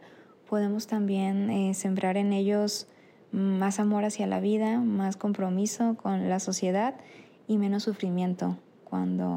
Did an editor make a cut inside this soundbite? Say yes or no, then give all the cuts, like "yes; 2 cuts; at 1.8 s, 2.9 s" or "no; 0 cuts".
no; 0 cuts